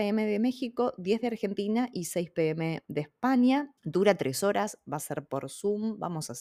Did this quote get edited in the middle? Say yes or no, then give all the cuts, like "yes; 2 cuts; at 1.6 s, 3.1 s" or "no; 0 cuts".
yes; 1 cut; at 3.8 s